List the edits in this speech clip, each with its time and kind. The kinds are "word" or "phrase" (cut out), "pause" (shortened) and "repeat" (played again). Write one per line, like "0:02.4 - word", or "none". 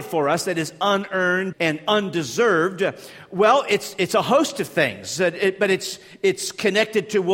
0:01.5 - word

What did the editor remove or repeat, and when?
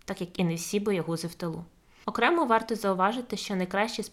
none

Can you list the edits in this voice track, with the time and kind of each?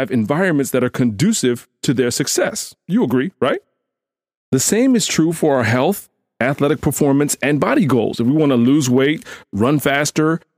none

